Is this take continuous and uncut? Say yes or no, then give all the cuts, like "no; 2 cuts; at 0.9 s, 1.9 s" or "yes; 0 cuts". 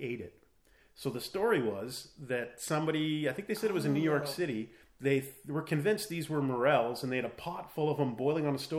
yes; 0 cuts